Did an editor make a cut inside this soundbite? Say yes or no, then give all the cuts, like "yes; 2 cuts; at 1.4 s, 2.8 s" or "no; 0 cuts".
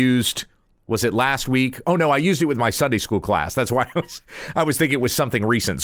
no; 0 cuts